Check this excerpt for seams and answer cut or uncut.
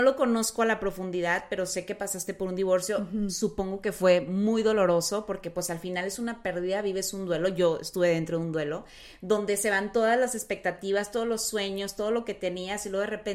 uncut